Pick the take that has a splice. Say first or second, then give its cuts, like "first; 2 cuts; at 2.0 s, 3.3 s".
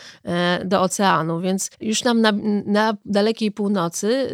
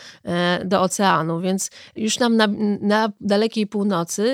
first; 1 cut; at 1.7 s